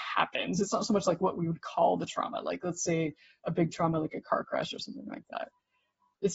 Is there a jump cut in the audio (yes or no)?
no